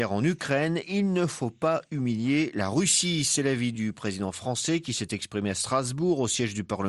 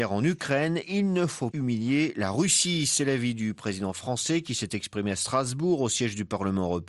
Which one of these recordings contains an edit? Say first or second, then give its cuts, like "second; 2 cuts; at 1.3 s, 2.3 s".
second; 1 cut; at 1.5 s